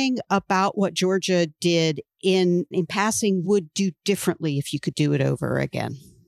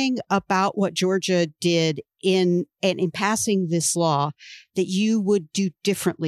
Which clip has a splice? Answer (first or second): first